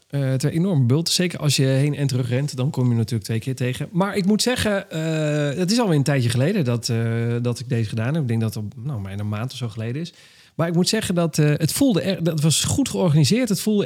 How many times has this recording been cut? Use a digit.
0